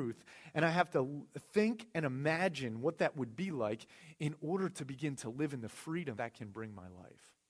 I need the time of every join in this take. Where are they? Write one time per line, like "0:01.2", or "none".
0:01.5
0:06.2